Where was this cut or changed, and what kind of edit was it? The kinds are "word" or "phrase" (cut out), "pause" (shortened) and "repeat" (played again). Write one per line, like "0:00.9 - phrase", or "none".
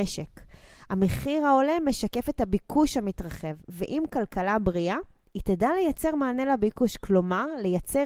none

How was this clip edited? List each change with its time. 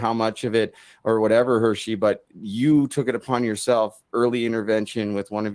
none

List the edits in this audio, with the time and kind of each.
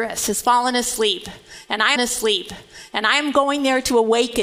0:02.0 - repeat

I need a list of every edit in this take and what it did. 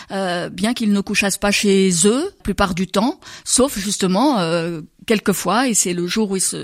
0:02.4 - word

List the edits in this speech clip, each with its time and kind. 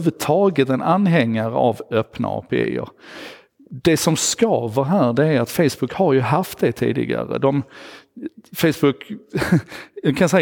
none

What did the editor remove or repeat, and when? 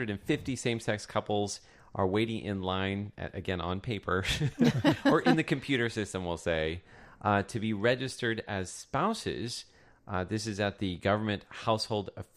none

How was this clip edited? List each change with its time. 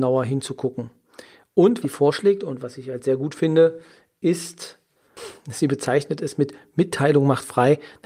0:01.8 - word

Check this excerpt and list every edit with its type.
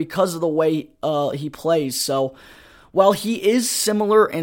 none

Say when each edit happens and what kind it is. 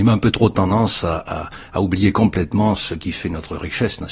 none

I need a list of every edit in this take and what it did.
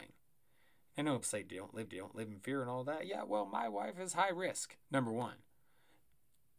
0:01.2 - word
0:01.9 - repeat
0:04.8 - pause

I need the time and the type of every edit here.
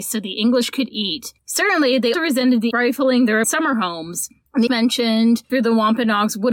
0:02.1 - word
0:02.7 - word
0:03.4 - word
0:04.7 - word
0:05.5 - word

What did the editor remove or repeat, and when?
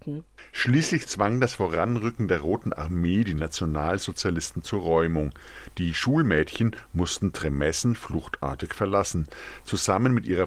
none

